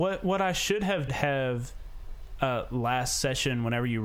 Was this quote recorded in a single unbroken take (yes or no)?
no